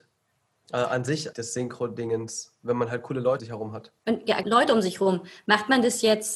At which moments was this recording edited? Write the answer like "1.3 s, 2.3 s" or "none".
1.3 s, 3.4 s, 4.0 s, 4.4 s